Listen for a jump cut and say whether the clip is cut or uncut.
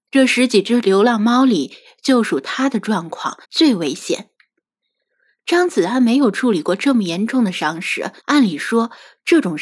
cut